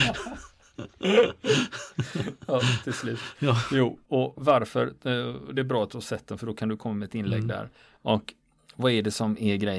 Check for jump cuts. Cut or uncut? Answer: uncut